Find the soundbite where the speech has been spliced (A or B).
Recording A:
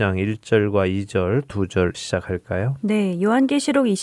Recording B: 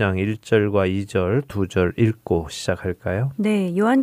A